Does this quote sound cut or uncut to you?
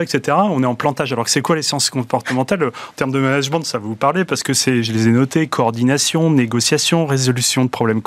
uncut